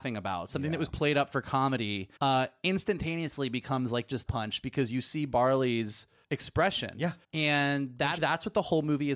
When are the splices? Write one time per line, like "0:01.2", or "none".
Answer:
0:02.2
0:04.3
0:06.2
0:07.2
0:08.2

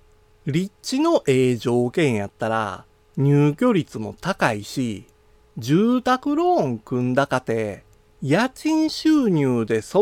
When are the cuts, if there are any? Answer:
none

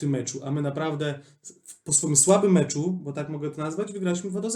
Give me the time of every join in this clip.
none

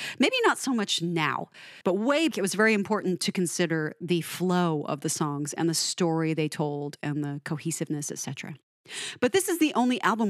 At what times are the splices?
0:01.8
0:02.3

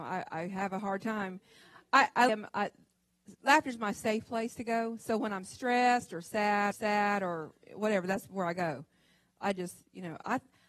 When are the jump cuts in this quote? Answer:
0:02.3
0:06.7

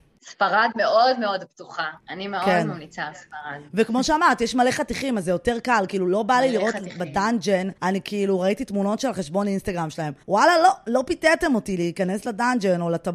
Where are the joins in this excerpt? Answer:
0:02.0
0:07.8
0:10.2

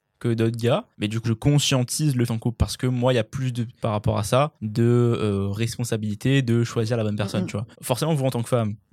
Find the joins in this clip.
0:00.9
0:01.2
0:02.3
0:03.8
0:04.5
0:07.7

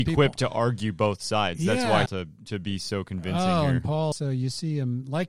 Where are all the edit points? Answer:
0:02.1
0:04.1

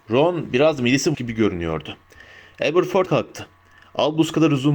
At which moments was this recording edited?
0:01.1
0:03.1

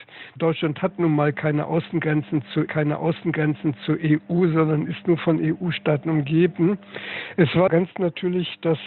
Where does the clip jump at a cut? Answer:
0:02.7
0:07.7

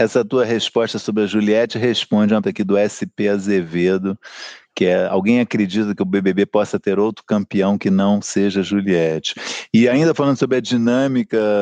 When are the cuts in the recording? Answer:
0:02.4

